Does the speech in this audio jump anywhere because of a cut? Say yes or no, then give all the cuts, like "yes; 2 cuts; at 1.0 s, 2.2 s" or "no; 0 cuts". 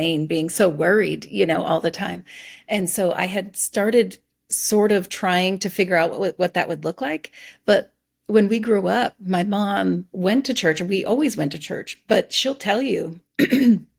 no; 0 cuts